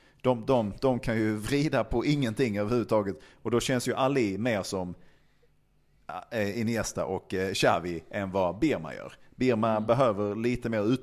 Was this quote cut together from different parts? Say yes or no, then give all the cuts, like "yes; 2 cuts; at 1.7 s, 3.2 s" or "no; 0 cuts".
no; 0 cuts